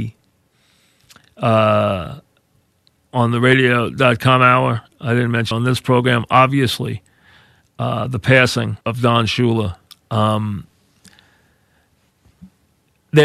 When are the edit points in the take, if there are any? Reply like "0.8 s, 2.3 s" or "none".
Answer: 5.5 s, 8.8 s, 9.9 s